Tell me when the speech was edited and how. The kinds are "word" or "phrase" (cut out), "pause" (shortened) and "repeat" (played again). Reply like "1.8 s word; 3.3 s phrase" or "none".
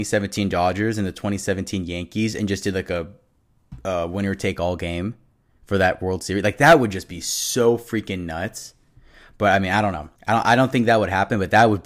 10.2 s pause